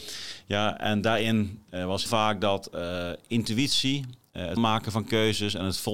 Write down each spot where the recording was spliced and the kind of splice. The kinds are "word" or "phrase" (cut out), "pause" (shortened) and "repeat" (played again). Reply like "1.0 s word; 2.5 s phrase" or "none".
2.1 s word; 4.6 s word